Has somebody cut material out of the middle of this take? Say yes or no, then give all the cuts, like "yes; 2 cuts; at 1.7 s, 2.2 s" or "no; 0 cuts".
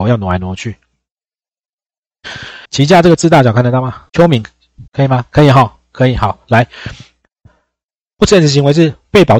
yes; 3 cuts; at 2.6 s, 4.1 s, 4.9 s